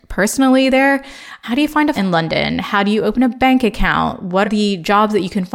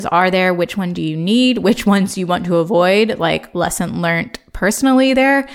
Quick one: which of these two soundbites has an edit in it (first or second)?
first